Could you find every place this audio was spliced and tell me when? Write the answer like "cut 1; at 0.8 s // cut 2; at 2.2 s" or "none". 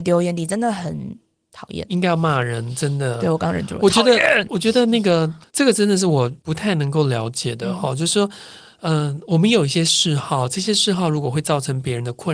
none